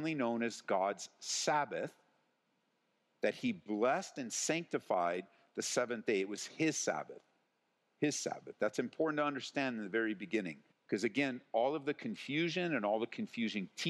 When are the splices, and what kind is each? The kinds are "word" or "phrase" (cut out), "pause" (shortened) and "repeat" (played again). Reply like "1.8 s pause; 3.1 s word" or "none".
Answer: 10.7 s pause